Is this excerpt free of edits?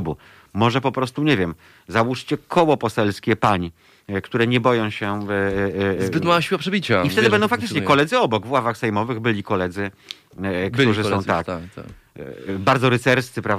yes; 0 cuts

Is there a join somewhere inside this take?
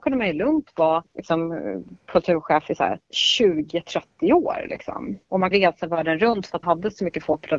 yes; 2 cuts; at 5.5 s, 6.6 s

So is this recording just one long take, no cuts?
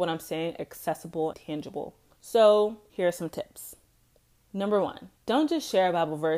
no; 2 cuts; at 1.3 s, 5.2 s

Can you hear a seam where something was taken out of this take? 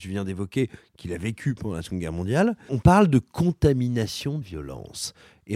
yes; 2 cuts; at 2.7 s, 4.4 s

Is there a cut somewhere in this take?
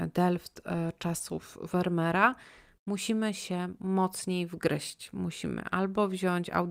no; 0 cuts

